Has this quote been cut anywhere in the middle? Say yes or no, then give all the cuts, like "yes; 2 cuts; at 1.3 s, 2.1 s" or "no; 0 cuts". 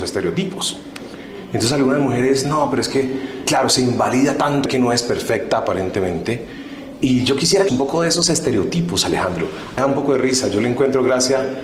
yes; 5 cuts; at 2.4 s, 3.5 s, 4.7 s, 7.7 s, 9.8 s